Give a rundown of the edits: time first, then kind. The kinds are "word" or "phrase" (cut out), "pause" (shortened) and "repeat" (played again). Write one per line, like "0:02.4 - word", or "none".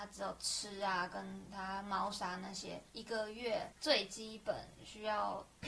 0:02.9 - pause